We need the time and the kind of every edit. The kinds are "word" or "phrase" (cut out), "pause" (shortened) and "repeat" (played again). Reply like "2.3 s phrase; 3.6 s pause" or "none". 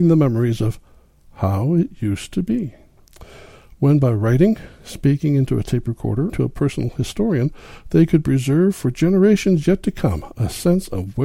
6.3 s phrase